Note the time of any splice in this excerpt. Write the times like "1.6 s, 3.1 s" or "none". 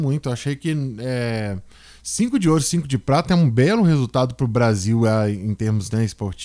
none